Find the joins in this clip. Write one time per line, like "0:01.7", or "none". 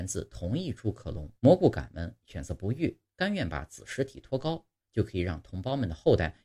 0:01.4